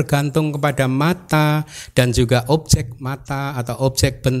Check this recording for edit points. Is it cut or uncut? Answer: uncut